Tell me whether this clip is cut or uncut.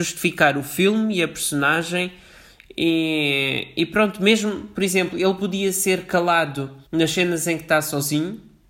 cut